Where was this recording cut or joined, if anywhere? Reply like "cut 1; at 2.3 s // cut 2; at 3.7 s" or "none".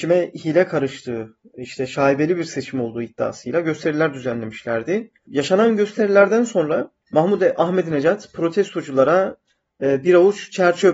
none